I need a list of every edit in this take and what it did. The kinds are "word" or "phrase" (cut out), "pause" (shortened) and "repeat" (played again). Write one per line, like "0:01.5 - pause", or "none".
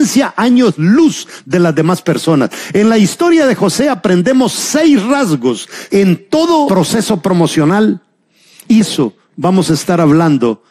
0:08.8 - word